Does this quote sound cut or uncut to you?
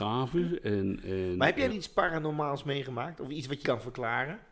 cut